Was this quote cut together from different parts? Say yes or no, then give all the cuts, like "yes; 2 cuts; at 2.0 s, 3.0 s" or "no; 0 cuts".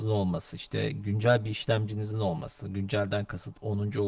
no; 0 cuts